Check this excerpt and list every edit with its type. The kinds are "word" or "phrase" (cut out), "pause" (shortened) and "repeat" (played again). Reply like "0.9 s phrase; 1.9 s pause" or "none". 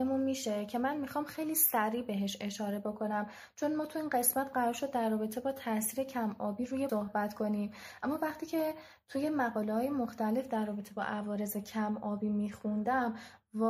6.9 s word